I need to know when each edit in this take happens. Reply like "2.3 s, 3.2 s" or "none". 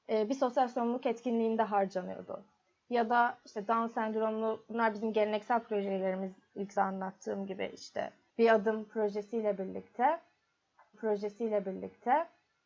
6.8 s, 10.9 s

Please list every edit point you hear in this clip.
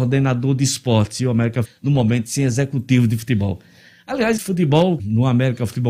1.6 s, 4.4 s, 5.0 s

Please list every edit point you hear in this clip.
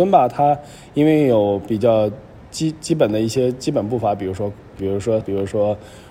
4.8 s, 5.2 s

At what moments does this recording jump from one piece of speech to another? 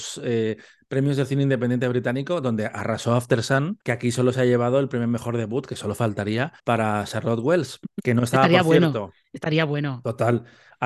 3.8 s, 6.6 s

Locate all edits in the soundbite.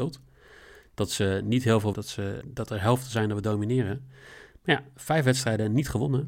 1.9 s, 2.4 s

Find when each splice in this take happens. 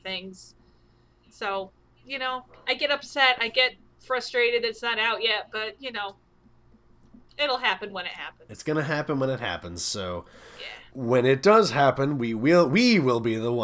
7.3 s

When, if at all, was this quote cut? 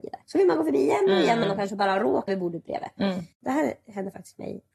1.4 s, 2.3 s

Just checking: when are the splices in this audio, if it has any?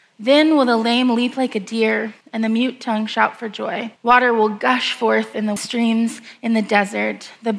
2.2 s, 4.0 s, 5.6 s

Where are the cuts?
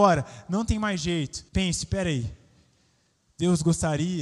1.5 s

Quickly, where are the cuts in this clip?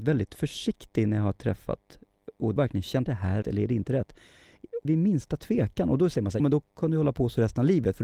2.6 s, 3.1 s, 3.4 s, 4.8 s, 6.4 s

